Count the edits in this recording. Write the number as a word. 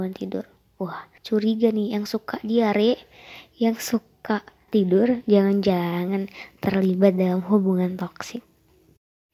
two